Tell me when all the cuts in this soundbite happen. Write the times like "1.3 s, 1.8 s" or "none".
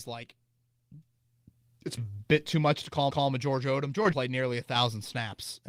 2.0 s, 3.1 s, 4.1 s